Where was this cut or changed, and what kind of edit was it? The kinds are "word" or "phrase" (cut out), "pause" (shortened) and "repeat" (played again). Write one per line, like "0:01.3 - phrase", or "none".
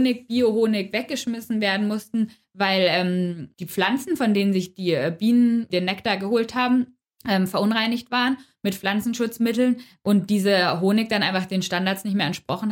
0:07.1 - pause